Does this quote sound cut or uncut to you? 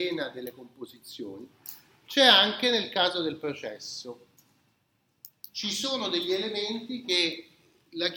uncut